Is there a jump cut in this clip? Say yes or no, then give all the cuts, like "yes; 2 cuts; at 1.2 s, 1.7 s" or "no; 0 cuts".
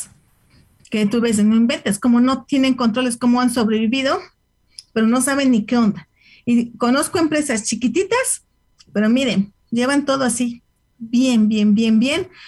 no; 0 cuts